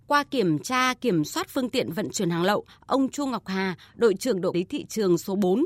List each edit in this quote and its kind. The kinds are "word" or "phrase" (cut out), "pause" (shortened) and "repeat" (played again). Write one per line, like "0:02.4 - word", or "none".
0:04.5 - word